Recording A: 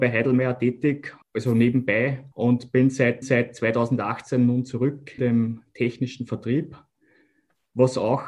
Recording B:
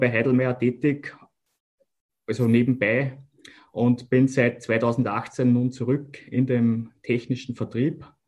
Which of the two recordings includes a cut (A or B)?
A